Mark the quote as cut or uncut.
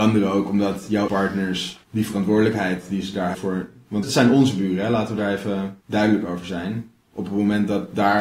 cut